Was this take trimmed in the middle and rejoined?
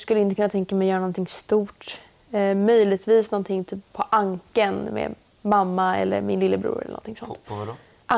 no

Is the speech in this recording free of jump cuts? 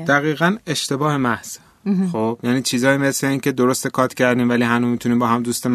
yes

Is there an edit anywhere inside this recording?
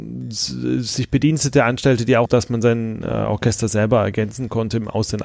yes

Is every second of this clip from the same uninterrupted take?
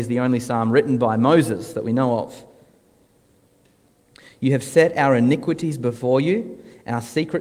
yes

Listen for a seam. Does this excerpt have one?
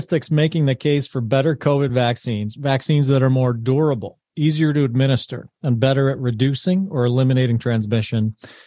no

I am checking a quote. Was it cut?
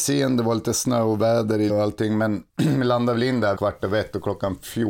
yes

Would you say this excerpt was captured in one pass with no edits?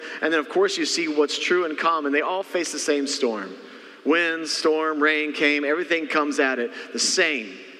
yes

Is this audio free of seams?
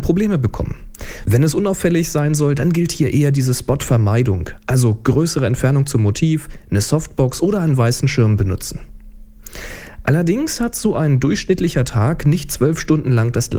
yes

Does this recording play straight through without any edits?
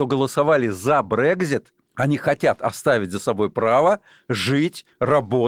yes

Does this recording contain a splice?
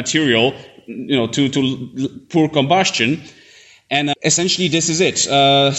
no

